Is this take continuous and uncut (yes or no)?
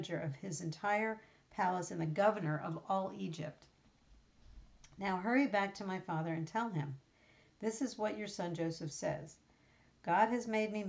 yes